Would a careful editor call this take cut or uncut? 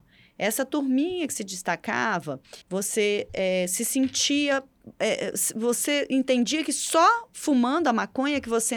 cut